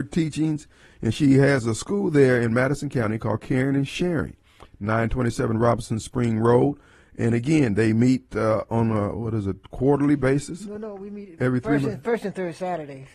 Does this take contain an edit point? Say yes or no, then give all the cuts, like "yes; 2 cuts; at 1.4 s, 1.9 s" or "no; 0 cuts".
no; 0 cuts